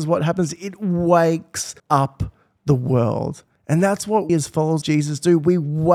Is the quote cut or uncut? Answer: cut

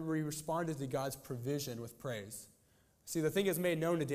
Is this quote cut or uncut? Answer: uncut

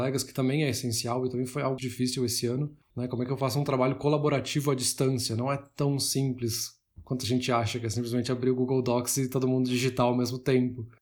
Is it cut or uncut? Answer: cut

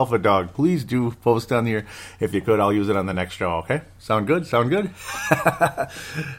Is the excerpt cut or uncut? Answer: uncut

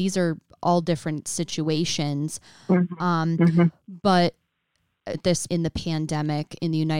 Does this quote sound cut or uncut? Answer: cut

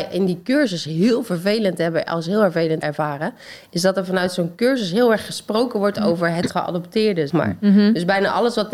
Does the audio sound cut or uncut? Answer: cut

